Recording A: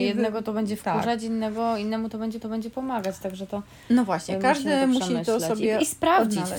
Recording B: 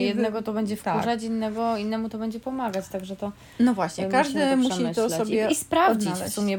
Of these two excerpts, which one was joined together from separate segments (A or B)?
A